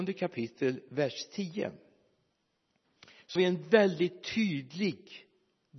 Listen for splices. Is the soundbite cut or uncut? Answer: cut